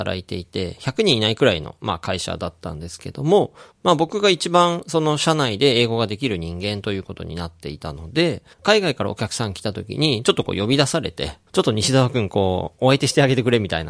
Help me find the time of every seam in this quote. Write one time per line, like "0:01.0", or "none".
0:03.7
0:08.5
0:11.5